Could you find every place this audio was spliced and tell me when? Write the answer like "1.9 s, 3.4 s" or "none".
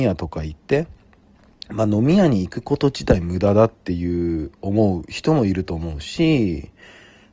none

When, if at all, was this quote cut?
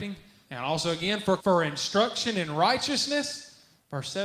1.4 s

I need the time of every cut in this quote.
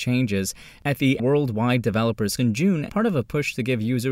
1.2 s, 2.4 s, 2.9 s

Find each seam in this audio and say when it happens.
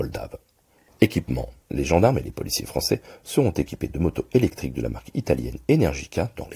1.6 s

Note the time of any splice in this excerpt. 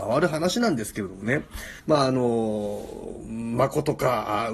1.8 s

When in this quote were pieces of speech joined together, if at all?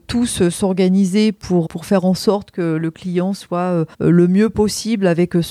1.7 s, 3.9 s

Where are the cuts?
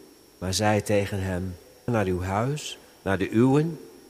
1.9 s

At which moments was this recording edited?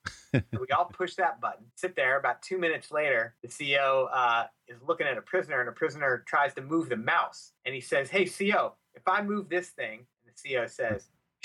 1.7 s, 3.4 s, 7.6 s, 10.1 s

